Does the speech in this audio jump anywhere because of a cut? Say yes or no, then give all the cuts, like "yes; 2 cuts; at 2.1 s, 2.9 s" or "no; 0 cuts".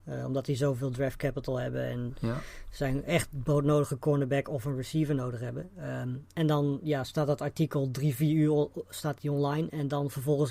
no; 0 cuts